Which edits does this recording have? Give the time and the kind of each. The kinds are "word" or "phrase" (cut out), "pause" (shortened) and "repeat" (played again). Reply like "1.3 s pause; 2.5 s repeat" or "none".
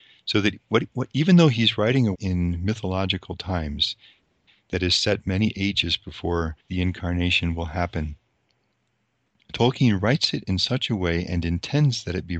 2.1 s phrase; 6.6 s pause

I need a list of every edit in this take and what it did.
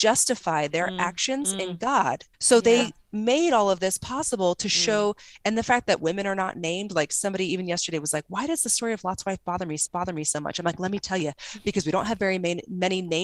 2.3 s pause; 9.9 s repeat

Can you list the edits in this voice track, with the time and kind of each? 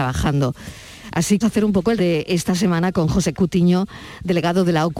1.4 s phrase; 2.0 s word; 3.3 s word

